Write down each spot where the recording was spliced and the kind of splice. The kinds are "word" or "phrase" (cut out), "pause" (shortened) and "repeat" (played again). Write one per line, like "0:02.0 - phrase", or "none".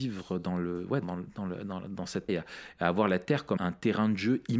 0:01.0 - word
0:02.3 - word
0:03.6 - word